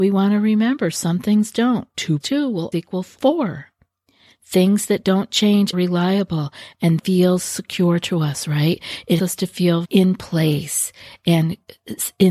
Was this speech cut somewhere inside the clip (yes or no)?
yes